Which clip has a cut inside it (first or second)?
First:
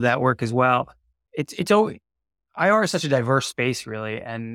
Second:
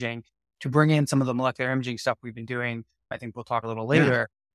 second